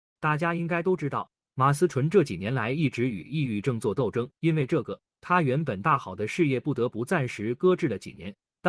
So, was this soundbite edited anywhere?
yes; 1 cut; at 4.3 s

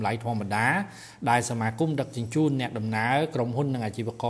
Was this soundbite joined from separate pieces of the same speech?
no; 0 cuts

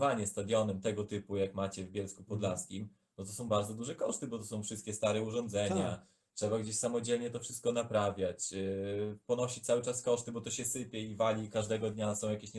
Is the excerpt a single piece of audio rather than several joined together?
yes; 0 cuts

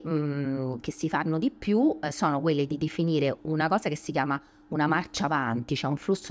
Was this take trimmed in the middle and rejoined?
no; 0 cuts

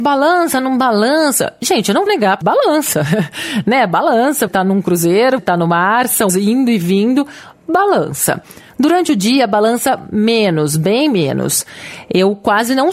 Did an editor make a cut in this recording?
yes; 5 cuts; at 2.1 s, 2.4 s, 4.5 s, 5.4 s, 6.3 s

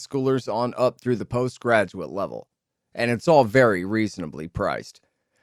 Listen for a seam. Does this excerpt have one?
no; 0 cuts

